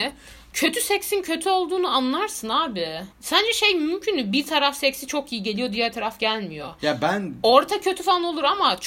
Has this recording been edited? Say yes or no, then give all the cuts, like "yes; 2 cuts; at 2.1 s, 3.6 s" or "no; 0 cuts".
yes; 1 cut; at 3.1 s